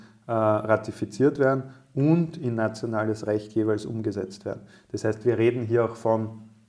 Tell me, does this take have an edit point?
no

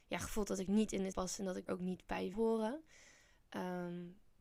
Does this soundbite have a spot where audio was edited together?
yes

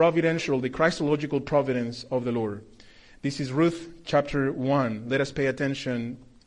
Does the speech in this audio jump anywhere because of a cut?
no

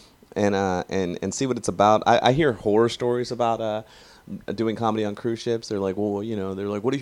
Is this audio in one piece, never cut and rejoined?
yes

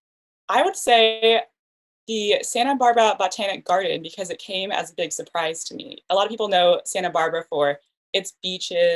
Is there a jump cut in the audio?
no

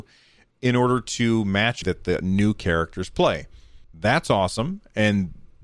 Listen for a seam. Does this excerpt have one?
yes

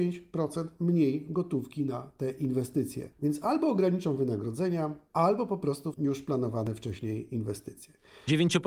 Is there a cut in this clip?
yes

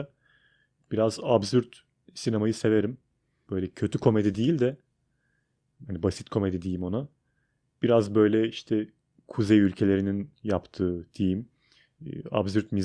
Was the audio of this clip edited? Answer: no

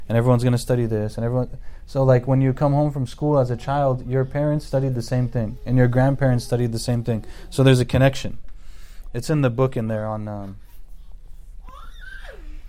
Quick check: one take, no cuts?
yes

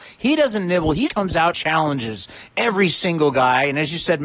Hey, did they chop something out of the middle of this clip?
yes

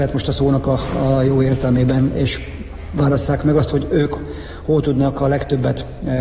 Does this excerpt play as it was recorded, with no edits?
yes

